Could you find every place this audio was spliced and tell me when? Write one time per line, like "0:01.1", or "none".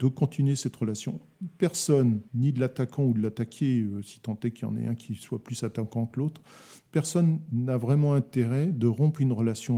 0:02.3